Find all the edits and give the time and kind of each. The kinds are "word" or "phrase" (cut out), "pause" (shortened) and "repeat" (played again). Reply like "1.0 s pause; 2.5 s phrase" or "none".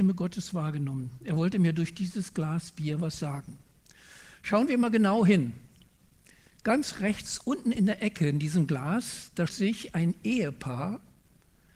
9.5 s word